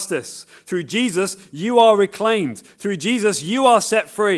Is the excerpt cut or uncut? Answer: uncut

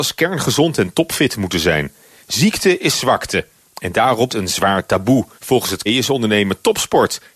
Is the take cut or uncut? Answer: cut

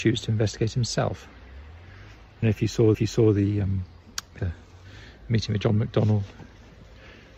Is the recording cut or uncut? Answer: cut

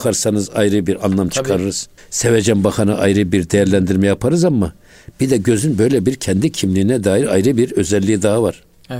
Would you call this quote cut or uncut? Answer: cut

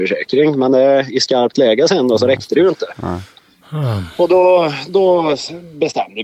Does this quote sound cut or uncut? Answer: uncut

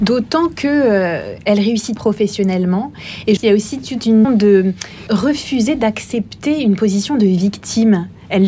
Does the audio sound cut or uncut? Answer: cut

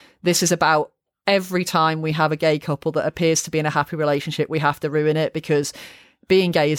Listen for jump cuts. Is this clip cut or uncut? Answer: uncut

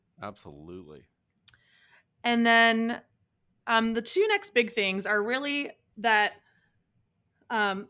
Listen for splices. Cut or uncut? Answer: uncut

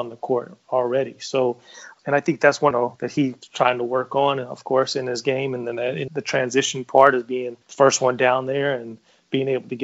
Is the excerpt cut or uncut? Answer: cut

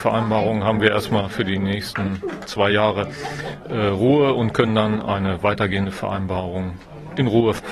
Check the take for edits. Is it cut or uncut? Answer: uncut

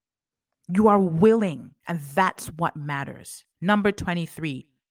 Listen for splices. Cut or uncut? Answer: cut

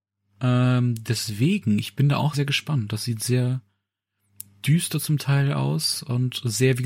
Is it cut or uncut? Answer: cut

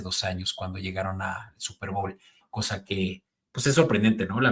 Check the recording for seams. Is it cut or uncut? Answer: uncut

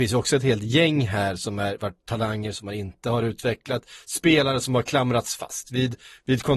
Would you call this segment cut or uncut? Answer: uncut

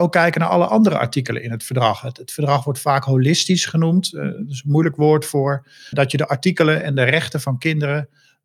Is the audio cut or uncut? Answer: cut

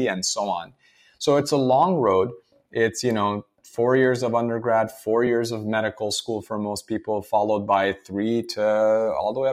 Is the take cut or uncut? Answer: uncut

